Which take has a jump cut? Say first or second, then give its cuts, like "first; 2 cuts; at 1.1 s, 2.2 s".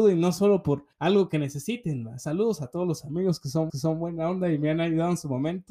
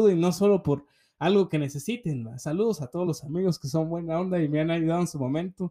first; 2 cuts; at 0.9 s, 3.7 s